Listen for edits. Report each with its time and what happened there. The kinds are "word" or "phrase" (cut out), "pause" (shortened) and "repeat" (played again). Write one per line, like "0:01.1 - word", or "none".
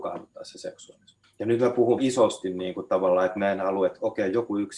0:01.2 - pause
0:02.0 - phrase